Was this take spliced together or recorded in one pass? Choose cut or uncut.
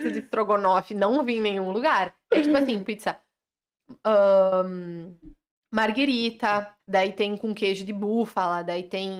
cut